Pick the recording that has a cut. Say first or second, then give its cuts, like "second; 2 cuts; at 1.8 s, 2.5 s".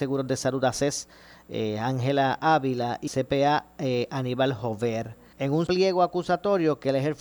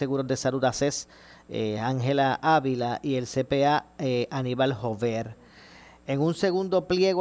first; 3 cuts; at 3.1 s, 5.3 s, 5.7 s